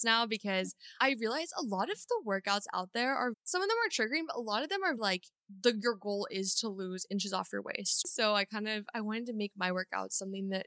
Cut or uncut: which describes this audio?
cut